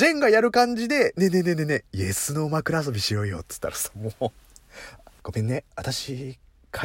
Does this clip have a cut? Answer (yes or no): yes